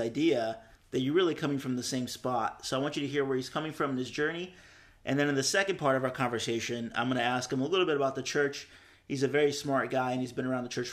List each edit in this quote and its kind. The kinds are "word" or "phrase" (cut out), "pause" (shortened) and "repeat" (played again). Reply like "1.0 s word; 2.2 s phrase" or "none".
none